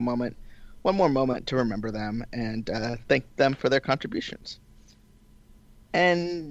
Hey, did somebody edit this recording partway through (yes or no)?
no